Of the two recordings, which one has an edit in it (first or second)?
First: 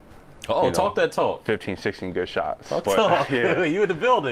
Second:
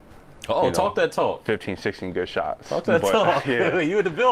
first